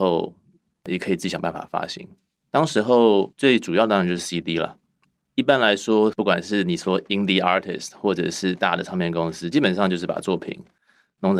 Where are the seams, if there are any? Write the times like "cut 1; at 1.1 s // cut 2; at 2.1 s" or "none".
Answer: none

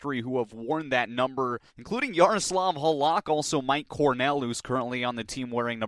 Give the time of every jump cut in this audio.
cut 1; at 1.7 s

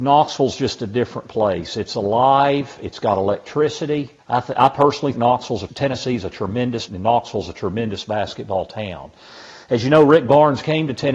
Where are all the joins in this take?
cut 1; at 4.2 s // cut 2; at 5.1 s // cut 3; at 5.7 s // cut 4; at 6.9 s

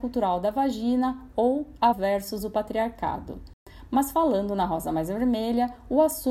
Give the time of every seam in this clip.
cut 1; at 1.9 s

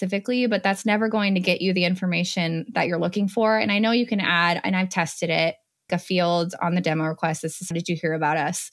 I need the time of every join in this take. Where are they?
cut 1; at 5.9 s // cut 2; at 7.7 s

